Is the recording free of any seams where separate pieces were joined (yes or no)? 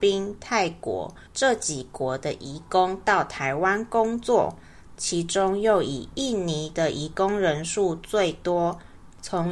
no